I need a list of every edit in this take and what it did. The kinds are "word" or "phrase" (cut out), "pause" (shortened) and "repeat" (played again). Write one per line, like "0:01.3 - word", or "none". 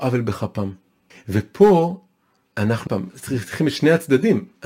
0:01.1 - pause
0:02.9 - word